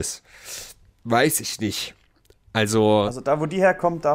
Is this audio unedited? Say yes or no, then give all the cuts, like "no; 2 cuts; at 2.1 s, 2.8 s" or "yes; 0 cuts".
yes; 0 cuts